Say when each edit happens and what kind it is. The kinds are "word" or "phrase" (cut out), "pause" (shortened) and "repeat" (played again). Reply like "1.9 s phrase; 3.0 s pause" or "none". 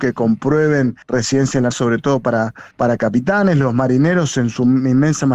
1.0 s pause; 1.7 s word; 2.7 s pause